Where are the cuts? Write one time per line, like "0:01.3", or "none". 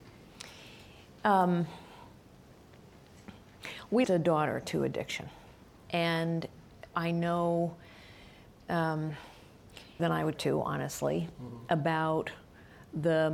0:04.0
0:06.9
0:10.0
0:10.4